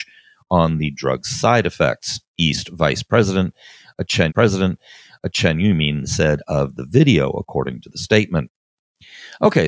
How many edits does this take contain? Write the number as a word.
two